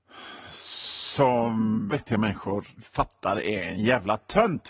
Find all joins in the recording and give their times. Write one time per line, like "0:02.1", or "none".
0:01.9
0:02.8